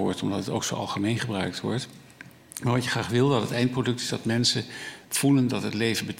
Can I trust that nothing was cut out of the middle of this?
no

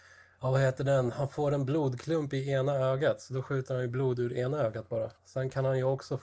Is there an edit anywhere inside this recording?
yes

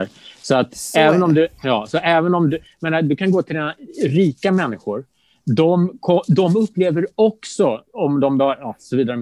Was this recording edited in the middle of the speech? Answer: yes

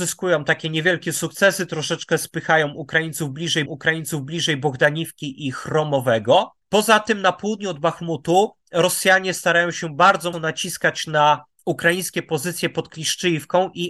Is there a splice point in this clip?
yes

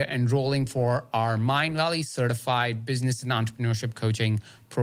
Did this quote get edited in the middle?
no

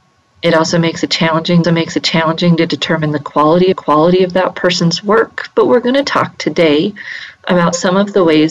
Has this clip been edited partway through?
yes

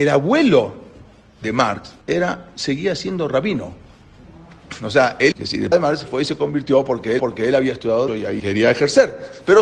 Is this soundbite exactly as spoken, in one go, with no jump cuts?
no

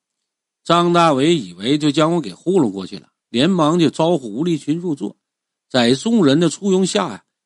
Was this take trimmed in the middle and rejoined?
no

